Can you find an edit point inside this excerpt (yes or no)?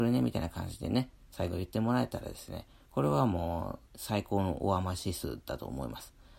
yes